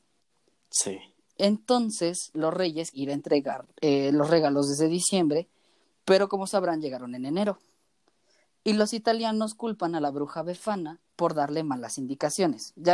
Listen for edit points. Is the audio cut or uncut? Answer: cut